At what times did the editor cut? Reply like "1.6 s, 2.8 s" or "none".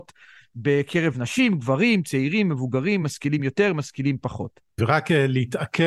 none

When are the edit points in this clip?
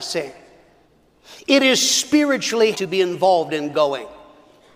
2.7 s

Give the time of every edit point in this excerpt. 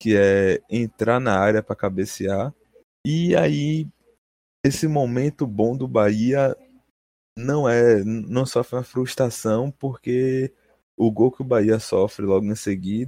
none

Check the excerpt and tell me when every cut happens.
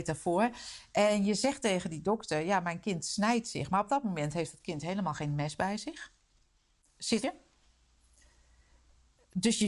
7.2 s

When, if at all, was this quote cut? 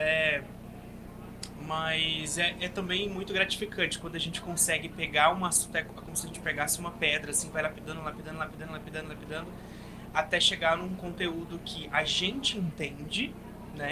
none

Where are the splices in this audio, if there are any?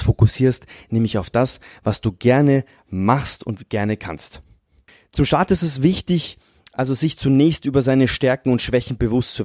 none

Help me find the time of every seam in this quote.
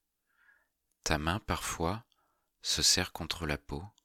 none

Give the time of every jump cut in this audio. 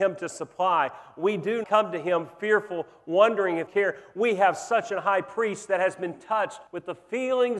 1.6 s, 3.7 s, 6.7 s

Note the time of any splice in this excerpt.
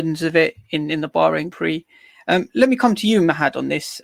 1.5 s

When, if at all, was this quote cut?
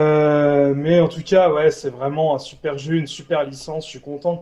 none

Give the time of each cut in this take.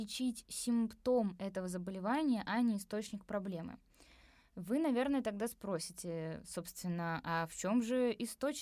none

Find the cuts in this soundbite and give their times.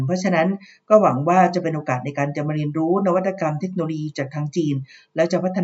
none

